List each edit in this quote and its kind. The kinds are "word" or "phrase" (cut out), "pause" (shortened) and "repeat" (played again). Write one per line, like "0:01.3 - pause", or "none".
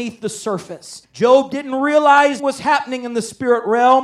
0:01.0 - pause
0:02.4 - word